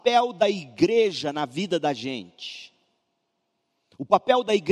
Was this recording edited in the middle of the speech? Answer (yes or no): no